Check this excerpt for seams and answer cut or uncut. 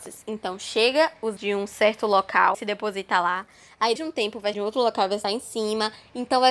cut